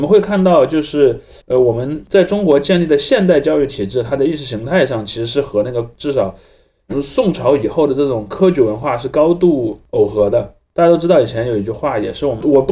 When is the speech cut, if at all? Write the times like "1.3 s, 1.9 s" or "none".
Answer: 1.4 s